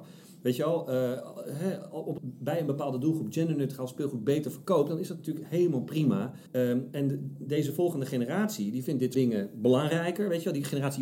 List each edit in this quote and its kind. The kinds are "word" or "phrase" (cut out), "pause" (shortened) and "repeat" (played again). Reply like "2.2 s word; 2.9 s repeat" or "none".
2.2 s phrase; 6.5 s pause; 9.1 s word